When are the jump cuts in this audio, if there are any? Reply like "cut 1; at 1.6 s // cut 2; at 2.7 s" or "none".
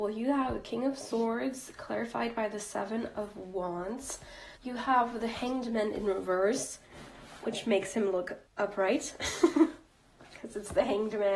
cut 1; at 4.6 s // cut 2; at 8.5 s